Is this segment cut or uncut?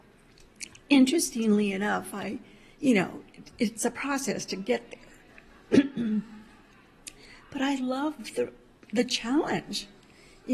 uncut